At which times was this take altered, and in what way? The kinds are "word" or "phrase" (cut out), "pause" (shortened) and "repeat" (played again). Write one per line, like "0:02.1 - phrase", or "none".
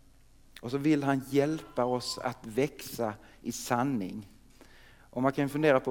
none